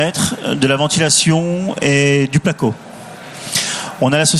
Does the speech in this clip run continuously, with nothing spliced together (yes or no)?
yes